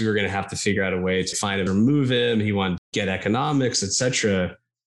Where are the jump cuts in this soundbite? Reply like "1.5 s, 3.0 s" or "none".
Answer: 1.3 s, 1.7 s, 2.8 s